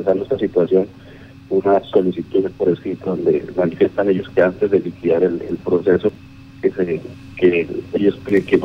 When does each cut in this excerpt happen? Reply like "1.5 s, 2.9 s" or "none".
none